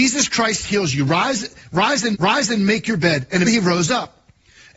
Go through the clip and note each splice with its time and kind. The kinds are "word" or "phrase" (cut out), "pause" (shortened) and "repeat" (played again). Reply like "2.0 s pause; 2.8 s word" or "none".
2.1 s repeat; 3.4 s word